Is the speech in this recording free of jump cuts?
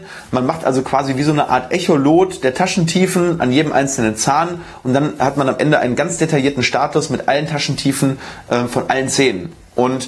yes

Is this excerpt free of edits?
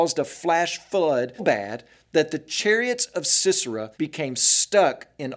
no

